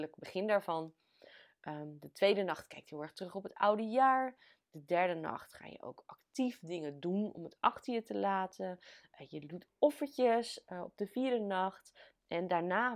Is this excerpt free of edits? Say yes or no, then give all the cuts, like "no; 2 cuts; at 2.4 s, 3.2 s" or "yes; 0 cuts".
yes; 0 cuts